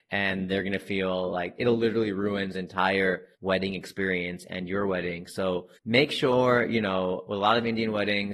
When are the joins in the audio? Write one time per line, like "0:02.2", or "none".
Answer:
0:02.5
0:03.3
0:05.8